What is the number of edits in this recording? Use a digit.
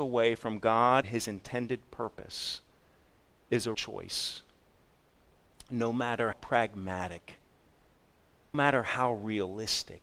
4